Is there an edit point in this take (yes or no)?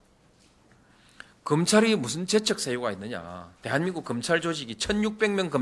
yes